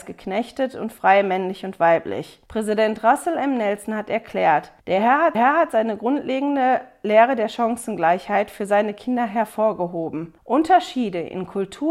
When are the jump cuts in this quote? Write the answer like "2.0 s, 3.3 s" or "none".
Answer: 2.5 s, 4.8 s, 5.3 s, 10.4 s